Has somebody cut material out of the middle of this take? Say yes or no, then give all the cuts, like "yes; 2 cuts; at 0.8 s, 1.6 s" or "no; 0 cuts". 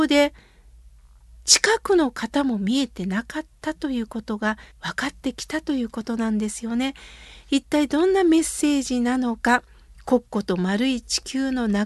yes; 1 cut; at 4.7 s